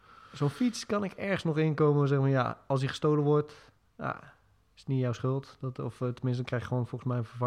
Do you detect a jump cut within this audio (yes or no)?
no